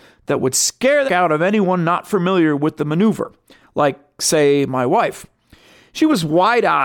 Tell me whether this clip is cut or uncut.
cut